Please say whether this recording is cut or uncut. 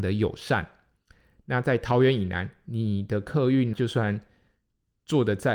cut